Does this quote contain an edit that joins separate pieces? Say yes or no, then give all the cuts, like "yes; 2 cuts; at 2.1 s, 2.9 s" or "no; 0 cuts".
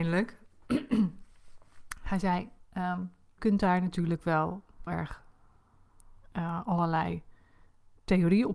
yes; 2 cuts; at 3.4 s, 4.9 s